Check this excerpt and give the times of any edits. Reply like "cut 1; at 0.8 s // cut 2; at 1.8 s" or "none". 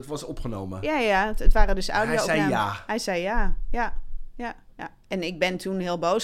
cut 1; at 4.7 s